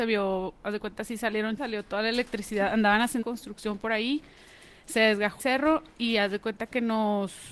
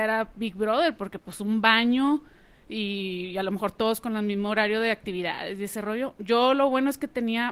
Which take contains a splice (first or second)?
first